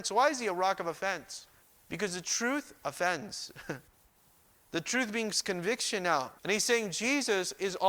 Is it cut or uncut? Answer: cut